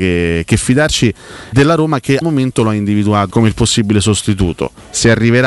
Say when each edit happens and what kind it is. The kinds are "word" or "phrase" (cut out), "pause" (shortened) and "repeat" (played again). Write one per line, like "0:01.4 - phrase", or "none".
0:01.5 - word
0:02.2 - word
0:03.3 - word